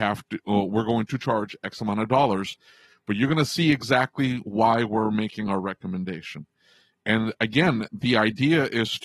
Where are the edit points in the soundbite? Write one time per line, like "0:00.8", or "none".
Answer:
none